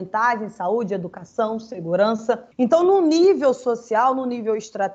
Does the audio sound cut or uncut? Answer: cut